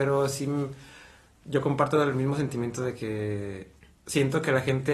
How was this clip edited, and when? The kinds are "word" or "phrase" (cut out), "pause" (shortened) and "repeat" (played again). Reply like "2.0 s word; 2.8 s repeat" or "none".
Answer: none